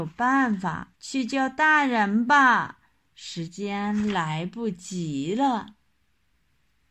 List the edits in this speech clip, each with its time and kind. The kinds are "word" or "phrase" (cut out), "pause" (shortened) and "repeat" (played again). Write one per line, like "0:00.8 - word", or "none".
0:01.0 - pause

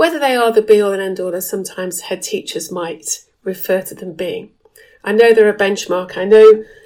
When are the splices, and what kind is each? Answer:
none

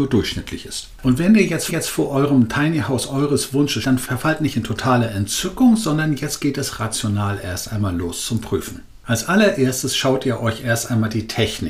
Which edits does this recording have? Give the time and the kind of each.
0:01.7 - repeat
0:03.8 - word

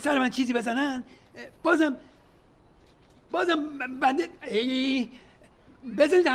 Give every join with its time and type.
0:01.6 - pause

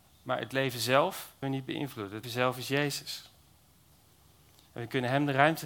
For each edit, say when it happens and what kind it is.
0:01.4 - word
0:02.2 - word

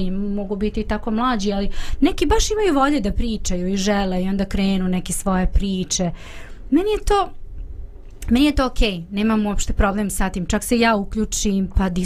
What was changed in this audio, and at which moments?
none

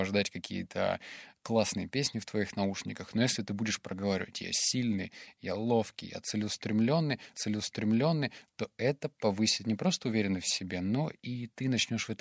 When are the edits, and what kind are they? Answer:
0:07.3 - repeat

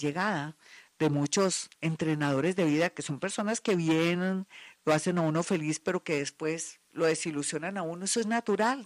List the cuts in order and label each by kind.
0:01.7 - pause
0:06.8 - pause

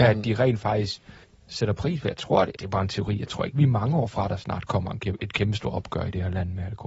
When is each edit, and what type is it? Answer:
0:01.2 - pause
0:02.6 - phrase

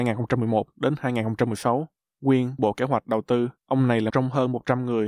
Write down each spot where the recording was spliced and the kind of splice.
0:02.6 - phrase
0:03.6 - pause
0:04.1 - word

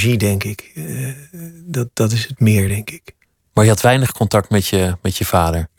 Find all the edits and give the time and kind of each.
none

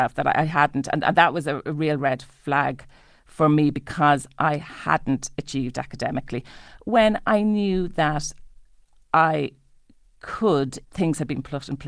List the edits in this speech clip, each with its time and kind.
0:10.8 - word

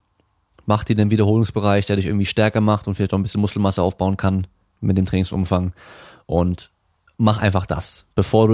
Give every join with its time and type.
none

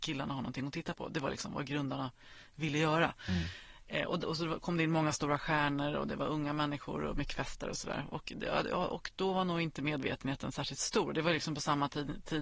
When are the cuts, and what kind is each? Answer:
0:04.2 - word

